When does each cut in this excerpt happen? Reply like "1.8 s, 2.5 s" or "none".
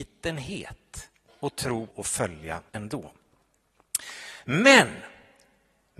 1.3 s, 1.9 s, 2.7 s